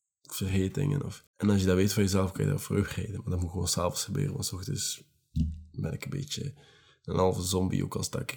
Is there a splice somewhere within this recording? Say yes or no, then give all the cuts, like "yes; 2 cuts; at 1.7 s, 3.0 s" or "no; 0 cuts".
yes; 1 cut; at 1.3 s